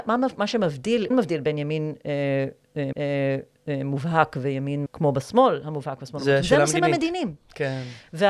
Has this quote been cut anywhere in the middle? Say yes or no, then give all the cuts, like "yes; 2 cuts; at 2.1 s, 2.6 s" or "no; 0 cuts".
yes; 3 cuts; at 1.1 s, 2.9 s, 4.9 s